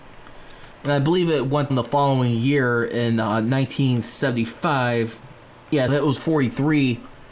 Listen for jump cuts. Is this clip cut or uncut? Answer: cut